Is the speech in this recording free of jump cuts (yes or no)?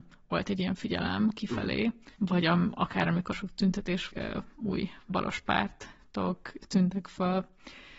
no